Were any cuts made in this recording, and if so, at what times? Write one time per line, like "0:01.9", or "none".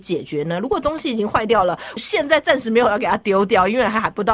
0:02.0